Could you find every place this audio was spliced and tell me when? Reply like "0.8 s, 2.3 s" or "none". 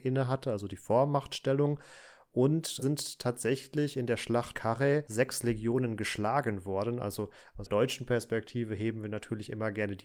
2.8 s, 4.5 s, 7.7 s